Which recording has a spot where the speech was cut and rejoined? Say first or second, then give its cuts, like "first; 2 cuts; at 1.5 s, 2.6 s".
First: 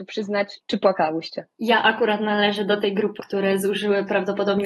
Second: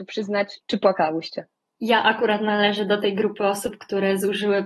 first; 2 cuts; at 1.5 s, 3.2 s